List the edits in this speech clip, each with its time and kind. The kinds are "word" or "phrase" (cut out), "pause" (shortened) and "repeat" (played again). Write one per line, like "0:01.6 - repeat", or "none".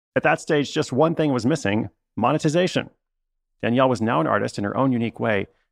none